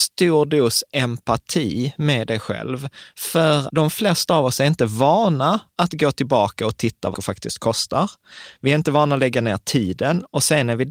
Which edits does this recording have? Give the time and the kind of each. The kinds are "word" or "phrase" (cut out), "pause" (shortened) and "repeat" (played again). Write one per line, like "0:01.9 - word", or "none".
0:03.7 - word
0:07.1 - word